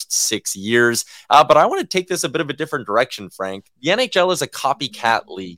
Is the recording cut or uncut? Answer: uncut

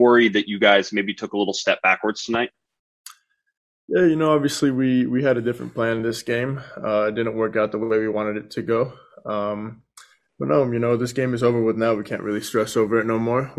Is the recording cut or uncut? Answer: uncut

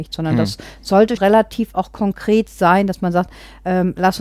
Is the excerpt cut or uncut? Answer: cut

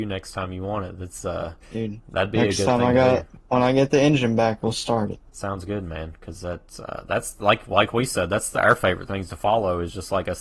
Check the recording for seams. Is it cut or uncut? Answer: cut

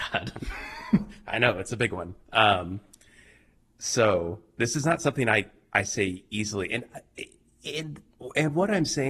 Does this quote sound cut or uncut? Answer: uncut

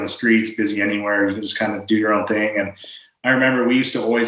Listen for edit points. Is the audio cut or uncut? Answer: uncut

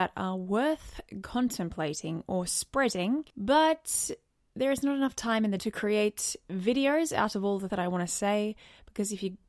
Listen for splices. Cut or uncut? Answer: cut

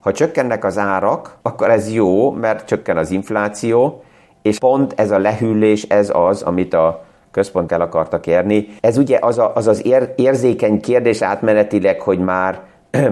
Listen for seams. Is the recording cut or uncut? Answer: cut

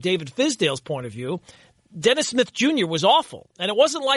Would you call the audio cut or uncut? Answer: uncut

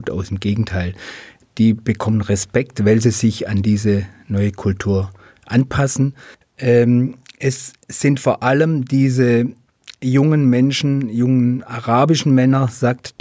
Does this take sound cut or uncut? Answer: uncut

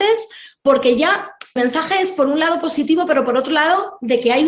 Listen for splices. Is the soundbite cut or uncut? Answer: cut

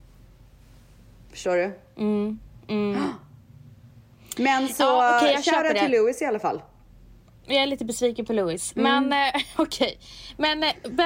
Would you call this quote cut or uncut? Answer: uncut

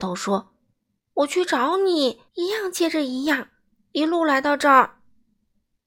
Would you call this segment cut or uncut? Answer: cut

